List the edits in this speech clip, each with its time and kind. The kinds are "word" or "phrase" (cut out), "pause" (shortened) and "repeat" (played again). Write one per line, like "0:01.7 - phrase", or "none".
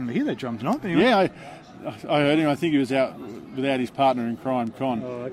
none